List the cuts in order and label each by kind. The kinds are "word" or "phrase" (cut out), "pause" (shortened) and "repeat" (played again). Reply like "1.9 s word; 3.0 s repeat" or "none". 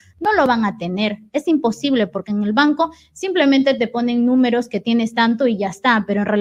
none